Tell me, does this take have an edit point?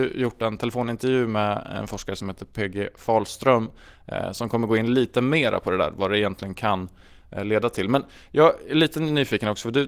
no; 0 cuts

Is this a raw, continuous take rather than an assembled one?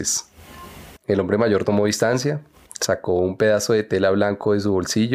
no; 1 cut; at 1.0 s

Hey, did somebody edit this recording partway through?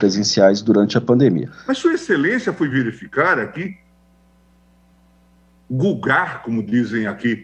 no; 0 cuts

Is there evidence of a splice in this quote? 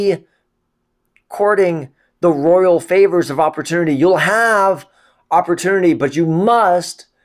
no; 0 cuts

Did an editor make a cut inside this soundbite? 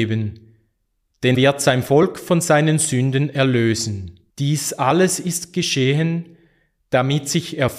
yes; 2 cuts; at 1.3 s, 4.3 s

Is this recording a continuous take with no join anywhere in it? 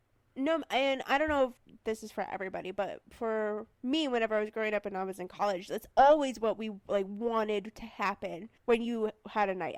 no; 4 cuts; at 1.6 s, 3.7 s, 5.9 s, 8.6 s

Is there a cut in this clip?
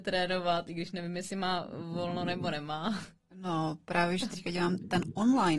no; 0 cuts

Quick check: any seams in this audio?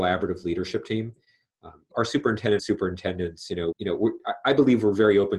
yes; 3 cuts; at 1.9 s, 2.6 s, 3.7 s

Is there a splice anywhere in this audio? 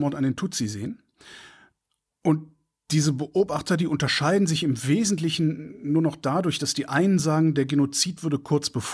no; 0 cuts

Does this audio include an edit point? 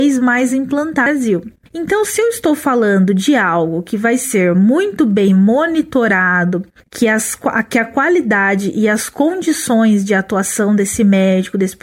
no; 0 cuts

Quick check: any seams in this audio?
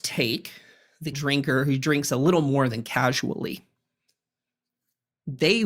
yes; 1 cut; at 1.1 s

